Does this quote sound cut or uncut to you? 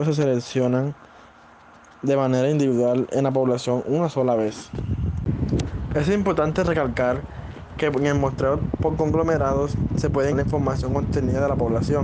cut